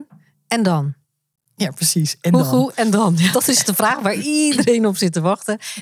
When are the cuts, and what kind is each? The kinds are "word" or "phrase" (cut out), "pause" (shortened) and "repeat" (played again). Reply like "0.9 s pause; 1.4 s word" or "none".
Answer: 3.3 s word